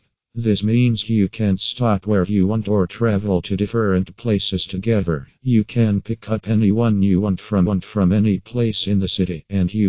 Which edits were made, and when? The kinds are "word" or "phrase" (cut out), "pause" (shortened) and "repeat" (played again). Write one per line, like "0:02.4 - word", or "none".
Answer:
0:05.4 - pause
0:07.7 - repeat